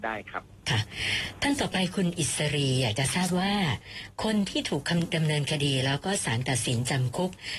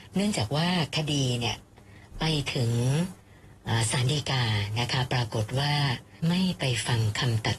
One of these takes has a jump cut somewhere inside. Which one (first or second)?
second